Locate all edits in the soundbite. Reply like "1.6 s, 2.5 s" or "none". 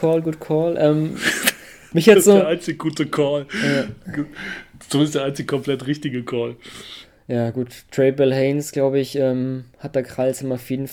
none